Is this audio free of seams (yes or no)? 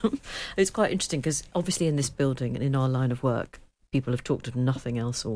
yes